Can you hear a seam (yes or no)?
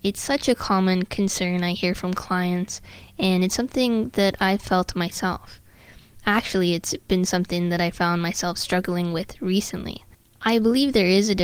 no